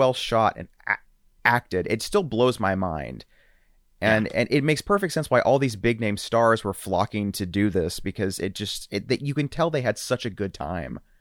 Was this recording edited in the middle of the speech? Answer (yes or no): no